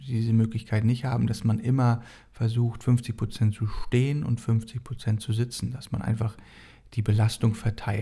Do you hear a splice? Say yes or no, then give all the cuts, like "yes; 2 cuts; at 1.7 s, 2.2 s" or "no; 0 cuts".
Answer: no; 0 cuts